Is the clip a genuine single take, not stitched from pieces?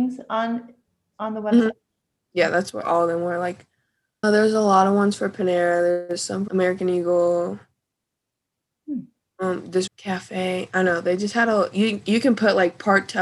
no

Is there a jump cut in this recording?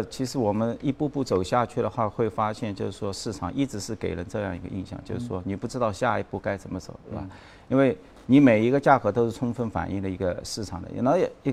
no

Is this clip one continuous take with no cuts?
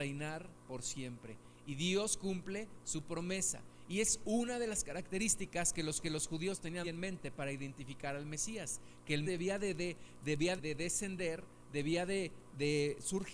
no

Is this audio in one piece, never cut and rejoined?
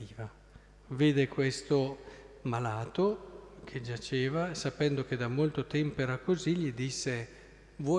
yes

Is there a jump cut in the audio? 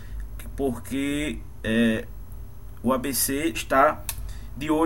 yes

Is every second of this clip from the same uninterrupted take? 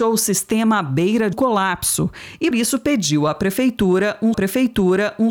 no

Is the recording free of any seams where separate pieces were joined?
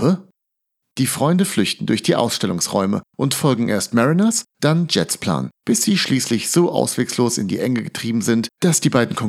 no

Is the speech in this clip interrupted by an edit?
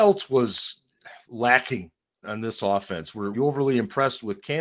yes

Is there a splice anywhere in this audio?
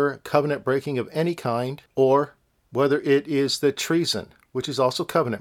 yes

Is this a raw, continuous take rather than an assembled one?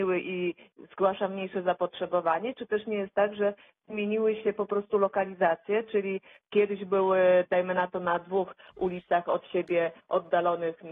yes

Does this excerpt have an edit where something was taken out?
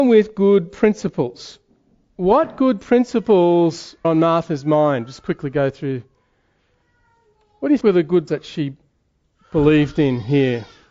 yes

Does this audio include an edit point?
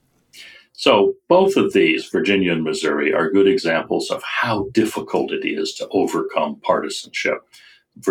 no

